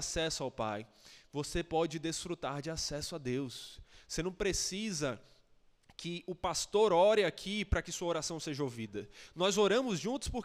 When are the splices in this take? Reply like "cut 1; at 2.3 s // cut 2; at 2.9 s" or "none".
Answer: none